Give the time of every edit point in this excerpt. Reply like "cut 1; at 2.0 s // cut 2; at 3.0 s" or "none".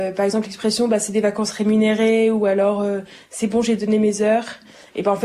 none